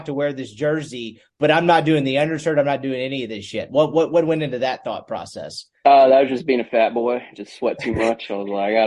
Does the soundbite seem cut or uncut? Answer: uncut